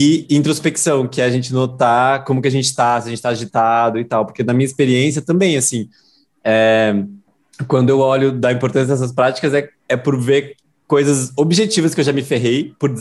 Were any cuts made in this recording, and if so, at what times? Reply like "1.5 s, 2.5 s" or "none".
7.3 s